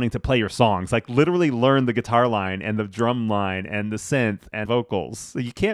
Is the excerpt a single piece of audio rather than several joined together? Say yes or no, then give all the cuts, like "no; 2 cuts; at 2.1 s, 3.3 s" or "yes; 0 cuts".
no; 1 cut; at 4.7 s